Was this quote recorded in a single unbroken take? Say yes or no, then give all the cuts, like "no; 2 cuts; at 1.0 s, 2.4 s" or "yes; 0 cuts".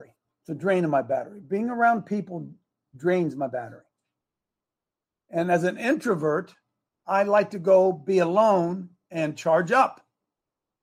yes; 0 cuts